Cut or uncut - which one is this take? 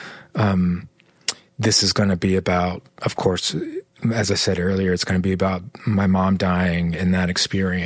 uncut